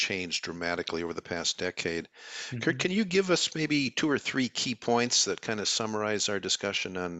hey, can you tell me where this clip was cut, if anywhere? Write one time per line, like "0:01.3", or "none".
none